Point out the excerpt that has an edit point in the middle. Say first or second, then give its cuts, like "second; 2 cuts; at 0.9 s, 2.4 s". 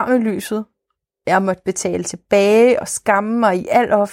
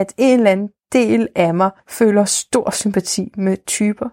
second; 1 cut; at 1.8 s